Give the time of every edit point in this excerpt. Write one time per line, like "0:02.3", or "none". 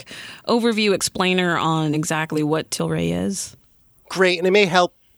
none